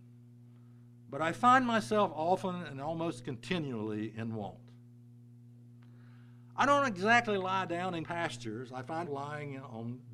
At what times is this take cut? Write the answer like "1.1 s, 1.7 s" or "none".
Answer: 8.0 s, 9.1 s